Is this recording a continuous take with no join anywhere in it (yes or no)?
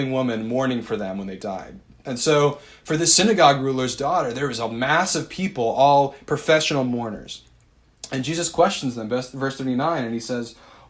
yes